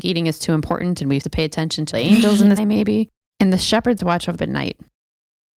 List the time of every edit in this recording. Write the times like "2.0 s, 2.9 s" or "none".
1.2 s, 1.9 s, 2.6 s, 4.0 s, 4.4 s